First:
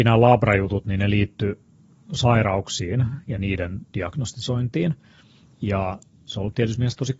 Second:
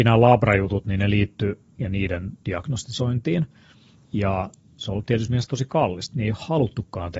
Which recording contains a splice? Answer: second; 1 cut; at 1.8 s

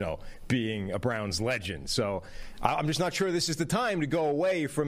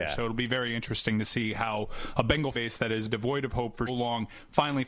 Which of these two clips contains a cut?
second; 3 cuts; at 2.5 s, 3.1 s, 3.9 s

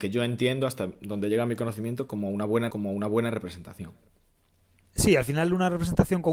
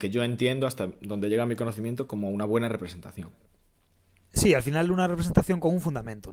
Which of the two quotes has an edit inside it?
first; 1 cut; at 2.7 s

